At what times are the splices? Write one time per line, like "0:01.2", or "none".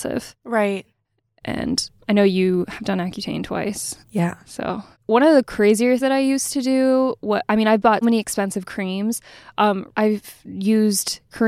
0:02.0
0:04.0
0:04.9
0:06.0
0:08.0

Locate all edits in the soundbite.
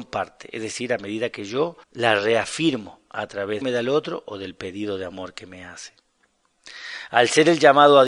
0:01.8
0:03.6

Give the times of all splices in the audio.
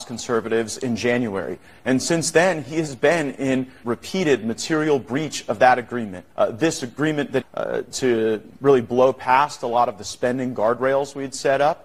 0:03.8
0:06.3
0:07.4
0:08.5

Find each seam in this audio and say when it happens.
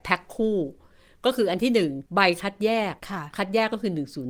0:02.1
0:03.0

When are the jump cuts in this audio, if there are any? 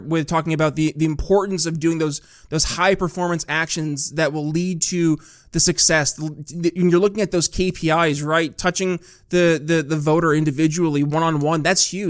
none

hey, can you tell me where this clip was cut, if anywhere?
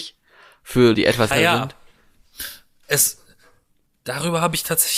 0:00.9
0:01.3

